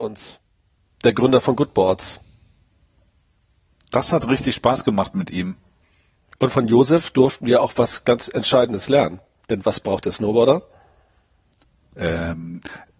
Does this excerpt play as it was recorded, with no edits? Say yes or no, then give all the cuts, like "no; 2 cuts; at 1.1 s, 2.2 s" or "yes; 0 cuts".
yes; 0 cuts